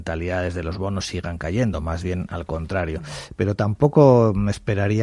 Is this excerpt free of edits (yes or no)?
yes